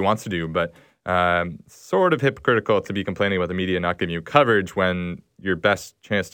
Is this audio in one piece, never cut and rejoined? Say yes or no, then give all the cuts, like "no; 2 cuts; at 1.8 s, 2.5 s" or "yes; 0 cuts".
yes; 0 cuts